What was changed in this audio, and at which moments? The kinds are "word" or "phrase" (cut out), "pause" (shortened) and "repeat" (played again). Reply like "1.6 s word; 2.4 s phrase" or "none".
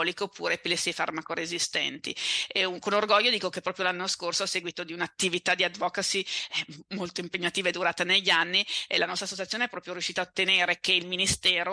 none